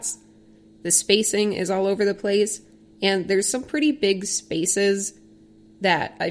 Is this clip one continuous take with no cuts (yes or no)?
yes